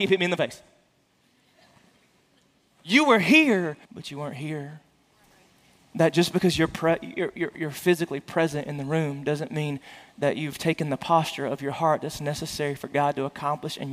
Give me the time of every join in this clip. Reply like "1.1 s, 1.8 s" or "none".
3.8 s, 5.2 s